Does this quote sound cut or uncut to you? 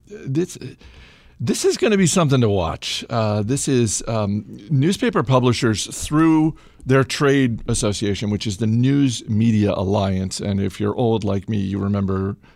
uncut